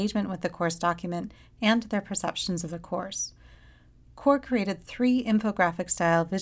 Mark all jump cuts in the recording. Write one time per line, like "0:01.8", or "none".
none